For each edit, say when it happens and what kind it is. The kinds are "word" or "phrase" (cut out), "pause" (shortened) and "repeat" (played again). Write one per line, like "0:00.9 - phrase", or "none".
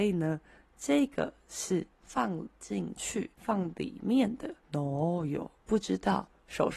0:01.9 - pause
0:03.3 - pause
0:04.6 - pause
0:05.6 - pause